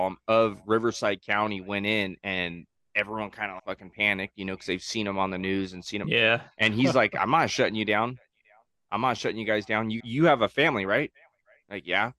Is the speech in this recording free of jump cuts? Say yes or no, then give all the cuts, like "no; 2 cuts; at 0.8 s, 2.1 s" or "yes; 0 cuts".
no; 3 cuts; at 2.8 s, 3.6 s, 10.0 s